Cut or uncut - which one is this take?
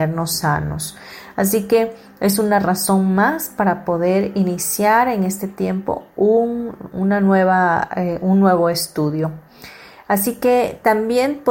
uncut